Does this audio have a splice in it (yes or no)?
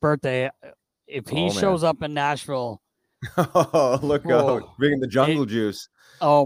no